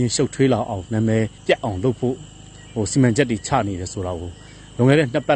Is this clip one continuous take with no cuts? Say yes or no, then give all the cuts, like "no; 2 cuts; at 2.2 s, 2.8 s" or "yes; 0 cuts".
no; 1 cut; at 1.4 s